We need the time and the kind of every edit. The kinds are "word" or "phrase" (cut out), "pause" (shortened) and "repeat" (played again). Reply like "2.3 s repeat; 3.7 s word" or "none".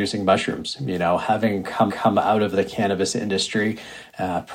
1.9 s repeat